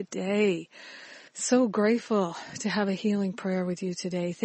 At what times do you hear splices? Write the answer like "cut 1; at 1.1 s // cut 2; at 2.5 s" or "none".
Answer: cut 1; at 1.3 s